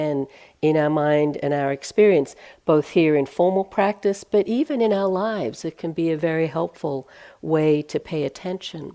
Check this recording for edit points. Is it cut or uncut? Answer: uncut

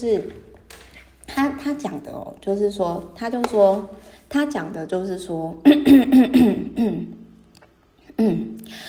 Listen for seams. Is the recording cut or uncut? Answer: uncut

